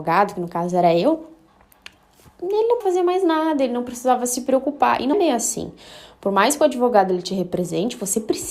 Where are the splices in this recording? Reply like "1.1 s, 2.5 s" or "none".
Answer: 2.8 s, 5.1 s